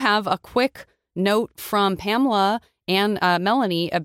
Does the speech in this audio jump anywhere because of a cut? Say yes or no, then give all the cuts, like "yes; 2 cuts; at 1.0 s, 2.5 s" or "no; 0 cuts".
no; 0 cuts